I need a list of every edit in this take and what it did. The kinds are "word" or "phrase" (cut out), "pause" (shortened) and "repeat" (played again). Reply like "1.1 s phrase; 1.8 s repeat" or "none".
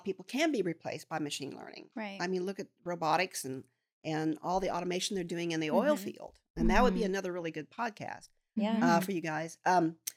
none